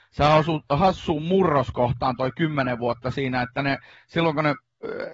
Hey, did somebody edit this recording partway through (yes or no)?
no